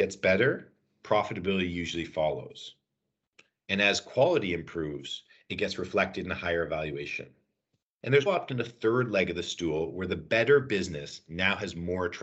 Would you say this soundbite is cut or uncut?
cut